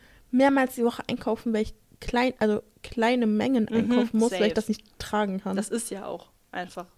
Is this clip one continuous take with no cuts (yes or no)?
yes